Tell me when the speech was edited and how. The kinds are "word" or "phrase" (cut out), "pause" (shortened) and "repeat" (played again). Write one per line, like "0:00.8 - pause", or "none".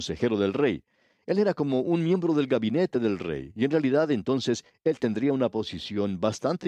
none